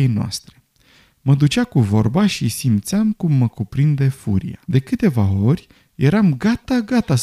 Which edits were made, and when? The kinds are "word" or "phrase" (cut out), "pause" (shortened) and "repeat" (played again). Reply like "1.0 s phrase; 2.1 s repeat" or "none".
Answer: 4.6 s pause